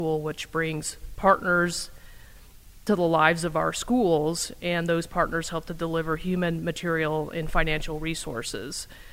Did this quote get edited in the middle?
yes; 1 cut; at 2.9 s

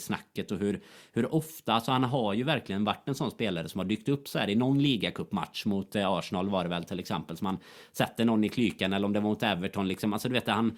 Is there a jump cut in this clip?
no; 0 cuts

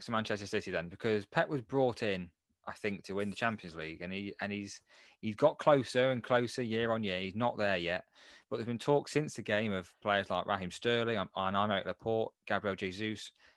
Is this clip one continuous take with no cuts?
yes; 0 cuts

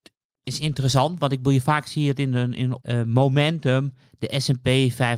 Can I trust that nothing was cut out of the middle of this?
no; 1 cut; at 2.8 s

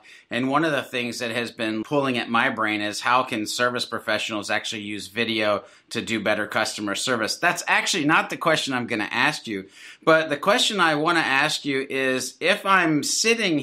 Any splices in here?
yes; 1 cut; at 1.8 s

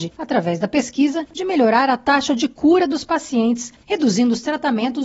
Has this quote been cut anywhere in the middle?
no; 0 cuts

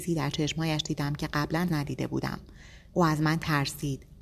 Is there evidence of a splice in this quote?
yes; 2 cuts; at 1.7 s, 2.9 s

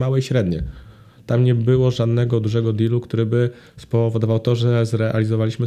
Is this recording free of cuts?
yes; 0 cuts

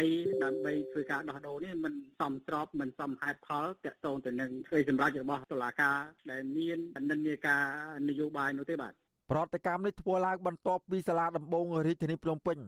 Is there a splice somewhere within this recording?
no; 0 cuts

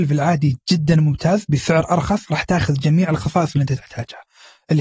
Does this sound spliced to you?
no; 0 cuts

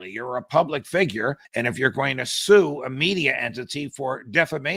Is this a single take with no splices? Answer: no; 1 cut; at 1.4 s

